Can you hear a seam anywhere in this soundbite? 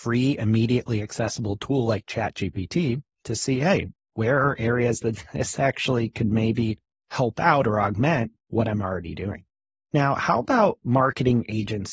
no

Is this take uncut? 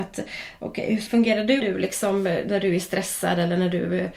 no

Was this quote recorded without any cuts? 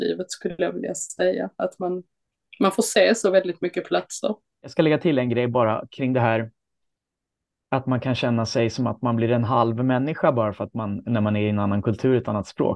yes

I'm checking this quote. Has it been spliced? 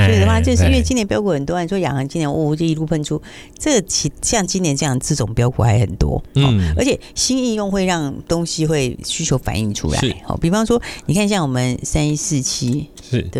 no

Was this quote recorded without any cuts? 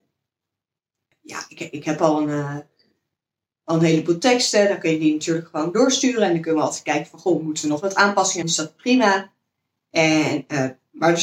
no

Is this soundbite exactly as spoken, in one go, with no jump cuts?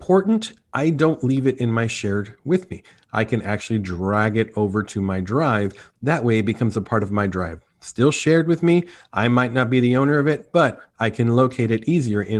yes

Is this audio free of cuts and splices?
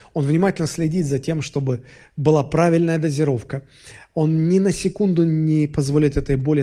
yes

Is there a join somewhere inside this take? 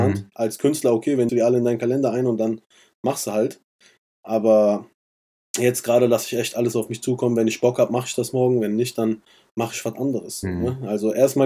yes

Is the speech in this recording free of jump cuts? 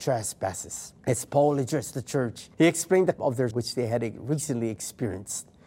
no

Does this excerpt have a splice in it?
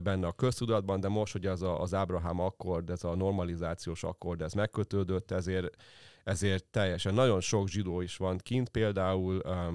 no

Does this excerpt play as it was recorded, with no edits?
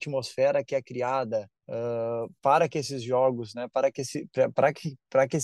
no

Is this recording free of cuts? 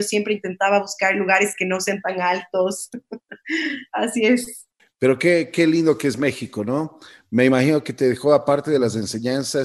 no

